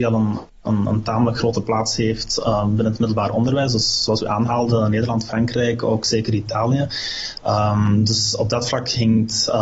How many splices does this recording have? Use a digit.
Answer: 0